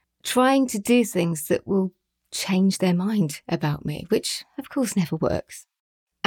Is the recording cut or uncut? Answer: uncut